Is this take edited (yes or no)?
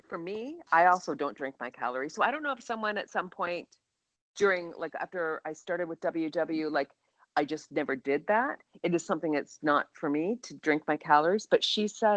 no